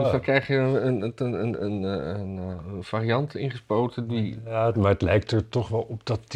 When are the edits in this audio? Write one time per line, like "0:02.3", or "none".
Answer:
none